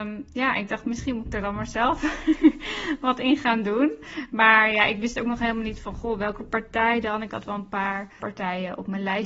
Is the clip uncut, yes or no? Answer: no